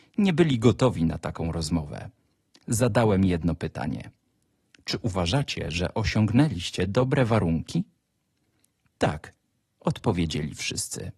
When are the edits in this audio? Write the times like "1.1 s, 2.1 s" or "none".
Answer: none